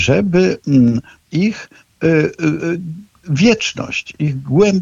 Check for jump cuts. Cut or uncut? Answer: cut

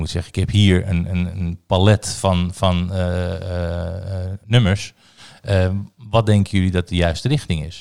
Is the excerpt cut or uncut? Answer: cut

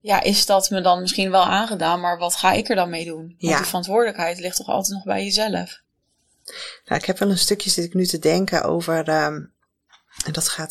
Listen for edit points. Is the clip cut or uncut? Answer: uncut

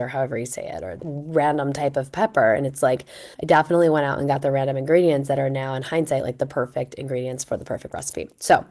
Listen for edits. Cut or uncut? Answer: cut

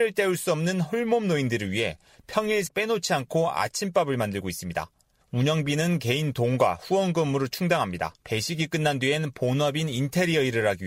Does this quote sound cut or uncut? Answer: cut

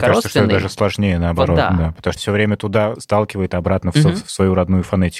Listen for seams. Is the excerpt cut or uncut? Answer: cut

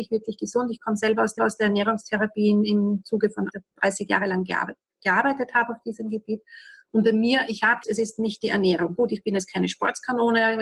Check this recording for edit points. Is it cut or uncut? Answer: cut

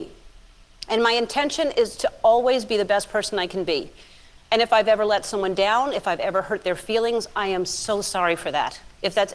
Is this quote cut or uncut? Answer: uncut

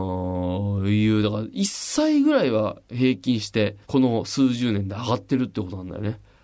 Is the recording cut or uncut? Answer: cut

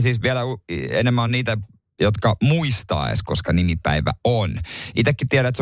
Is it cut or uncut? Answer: uncut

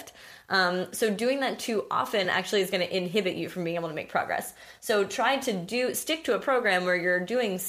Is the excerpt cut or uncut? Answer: uncut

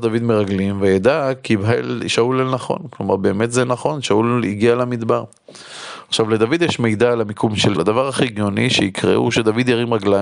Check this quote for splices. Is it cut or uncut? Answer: cut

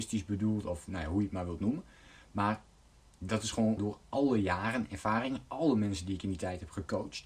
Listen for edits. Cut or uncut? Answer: cut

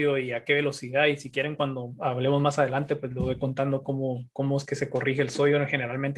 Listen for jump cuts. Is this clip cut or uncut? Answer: uncut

